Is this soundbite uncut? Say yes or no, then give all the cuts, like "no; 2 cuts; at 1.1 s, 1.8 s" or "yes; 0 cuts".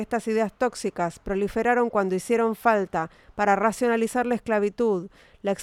yes; 0 cuts